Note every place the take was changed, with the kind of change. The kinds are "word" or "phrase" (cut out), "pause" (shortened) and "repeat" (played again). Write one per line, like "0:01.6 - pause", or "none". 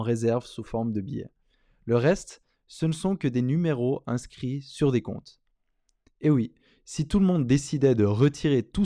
none